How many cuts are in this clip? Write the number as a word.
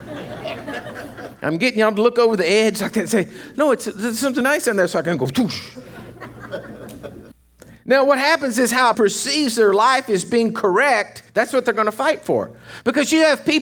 four